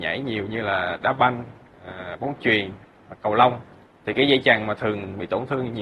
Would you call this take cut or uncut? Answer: uncut